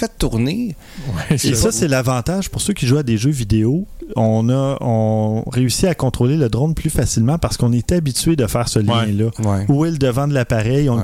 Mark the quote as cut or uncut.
uncut